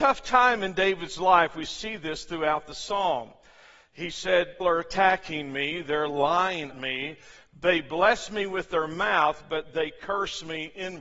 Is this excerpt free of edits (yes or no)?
no